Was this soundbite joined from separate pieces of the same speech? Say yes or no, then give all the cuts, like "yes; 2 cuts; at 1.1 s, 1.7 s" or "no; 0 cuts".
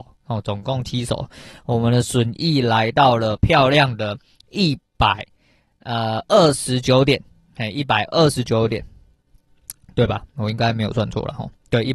no; 0 cuts